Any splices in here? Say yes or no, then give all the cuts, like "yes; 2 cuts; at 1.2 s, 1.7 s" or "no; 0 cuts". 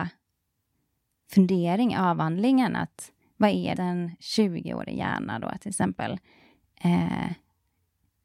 yes; 1 cut; at 3.7 s